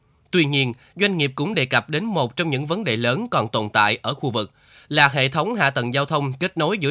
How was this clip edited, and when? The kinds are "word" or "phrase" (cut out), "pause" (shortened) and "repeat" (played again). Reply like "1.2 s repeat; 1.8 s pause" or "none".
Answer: none